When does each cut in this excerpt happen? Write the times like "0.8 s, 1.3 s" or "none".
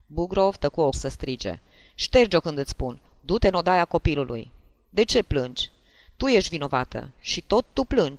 0.9 s